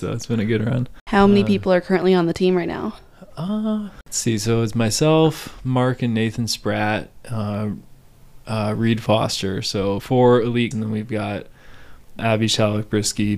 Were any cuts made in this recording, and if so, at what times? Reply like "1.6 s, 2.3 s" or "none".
10.0 s, 10.7 s, 12.2 s